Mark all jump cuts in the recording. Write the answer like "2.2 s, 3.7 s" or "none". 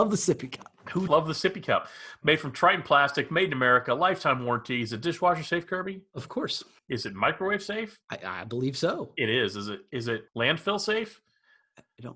1.1 s, 6.8 s, 8.0 s, 10.3 s

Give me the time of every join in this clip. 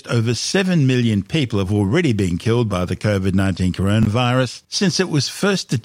none

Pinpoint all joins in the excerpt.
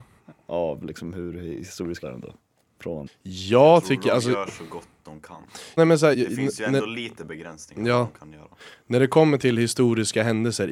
2.0 s, 3.1 s, 5.8 s, 6.1 s

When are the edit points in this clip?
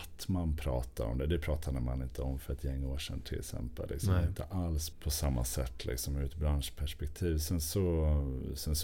4.9 s

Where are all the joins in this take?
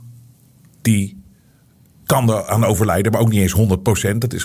none

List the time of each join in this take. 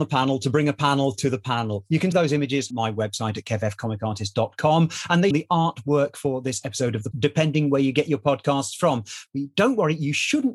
2.1 s, 2.7 s, 5.3 s, 7.1 s

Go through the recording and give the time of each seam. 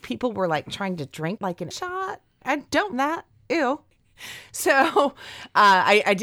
1.4 s, 1.7 s, 2.4 s, 2.9 s

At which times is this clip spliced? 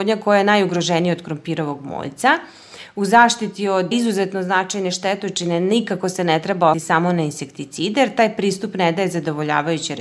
3.9 s, 6.7 s

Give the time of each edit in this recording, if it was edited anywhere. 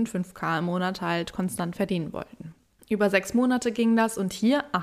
none

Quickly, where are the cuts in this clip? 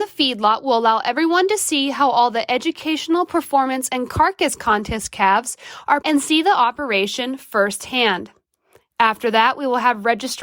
6.0 s

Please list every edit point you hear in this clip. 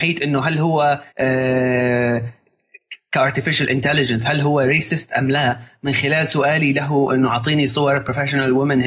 1.1 s

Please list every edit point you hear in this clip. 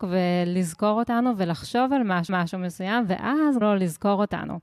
2.3 s, 3.6 s

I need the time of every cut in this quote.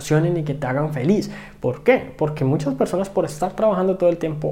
none

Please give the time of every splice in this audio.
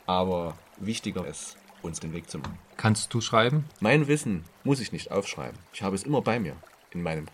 1.2 s, 2.0 s, 3.7 s, 5.7 s

